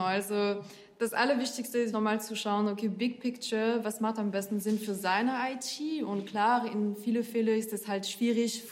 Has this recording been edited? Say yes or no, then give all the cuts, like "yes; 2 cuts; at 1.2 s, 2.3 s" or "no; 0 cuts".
yes; 1 cut; at 1.9 s